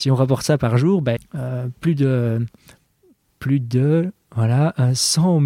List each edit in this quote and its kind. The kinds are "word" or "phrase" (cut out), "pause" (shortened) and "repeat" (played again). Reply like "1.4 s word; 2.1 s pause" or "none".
1.2 s phrase